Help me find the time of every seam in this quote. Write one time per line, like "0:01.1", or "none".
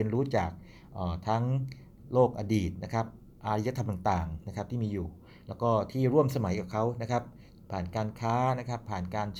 0:03.3